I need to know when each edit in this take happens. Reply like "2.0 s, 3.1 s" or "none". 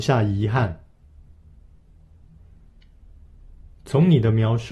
none

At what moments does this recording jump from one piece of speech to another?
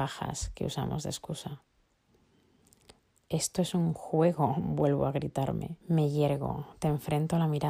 3.1 s, 5.8 s

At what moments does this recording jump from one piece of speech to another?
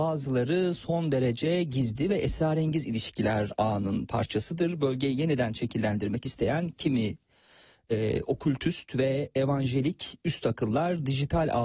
none

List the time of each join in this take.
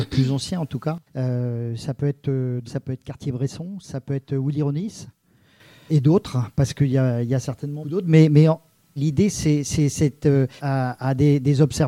1.1 s, 2.7 s, 5.9 s, 7.8 s, 9.0 s, 10.6 s

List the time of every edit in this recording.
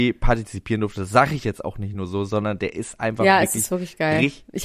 none

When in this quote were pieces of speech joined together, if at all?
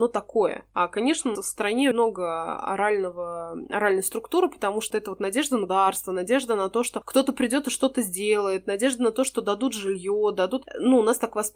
1.4 s, 1.9 s, 4.9 s, 5.7 s

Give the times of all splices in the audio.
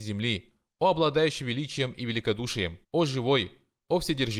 2.8 s

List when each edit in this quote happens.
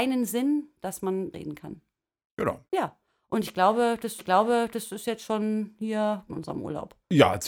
1.3 s, 2.7 s, 4.2 s, 6.3 s

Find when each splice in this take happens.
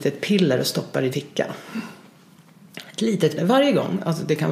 1.1 s, 3.4 s

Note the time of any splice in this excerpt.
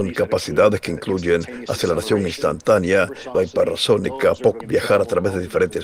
3.3 s, 4.6 s

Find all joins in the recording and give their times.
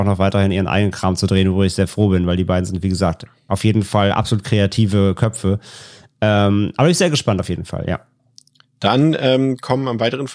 none

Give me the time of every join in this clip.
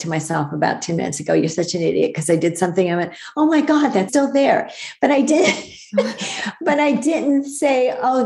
4.1 s

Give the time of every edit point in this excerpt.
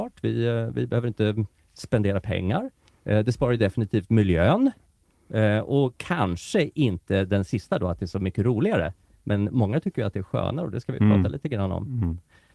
none

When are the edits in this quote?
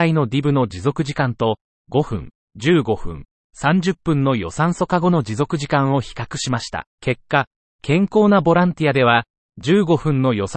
6.9 s

